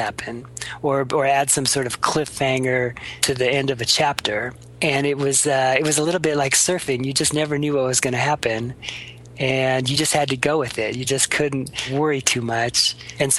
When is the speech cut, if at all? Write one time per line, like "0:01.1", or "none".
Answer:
none